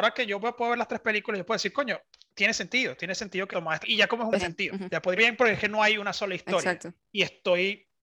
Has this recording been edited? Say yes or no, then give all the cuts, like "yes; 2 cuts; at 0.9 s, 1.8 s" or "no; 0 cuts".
yes; 4 cuts; at 3.5 s, 3.8 s, 4.4 s, 5.2 s